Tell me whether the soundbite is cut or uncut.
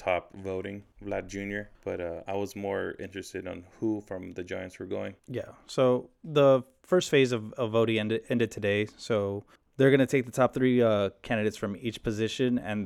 cut